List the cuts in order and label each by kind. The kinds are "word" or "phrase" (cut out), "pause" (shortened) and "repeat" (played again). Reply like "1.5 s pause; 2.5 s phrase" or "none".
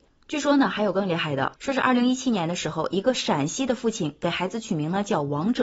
1.6 s pause